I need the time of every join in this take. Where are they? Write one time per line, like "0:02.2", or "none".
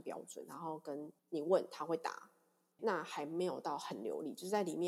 0:01.2
0:02.8